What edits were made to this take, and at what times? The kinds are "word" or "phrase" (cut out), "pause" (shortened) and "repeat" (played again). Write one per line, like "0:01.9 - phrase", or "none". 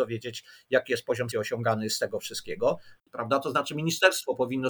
0:01.3 - word
0:03.0 - pause